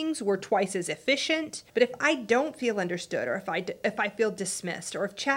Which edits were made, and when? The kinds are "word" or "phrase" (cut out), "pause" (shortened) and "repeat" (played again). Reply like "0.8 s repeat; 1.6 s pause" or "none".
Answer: 1.7 s pause